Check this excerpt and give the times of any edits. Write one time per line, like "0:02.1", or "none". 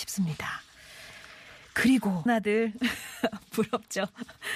0:02.3